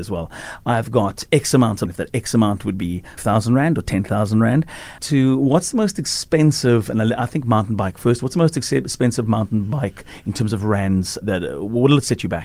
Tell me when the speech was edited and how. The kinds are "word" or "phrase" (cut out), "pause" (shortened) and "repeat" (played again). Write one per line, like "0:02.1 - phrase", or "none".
0:01.9 - word
0:03.2 - word
0:05.0 - phrase
0:11.2 - word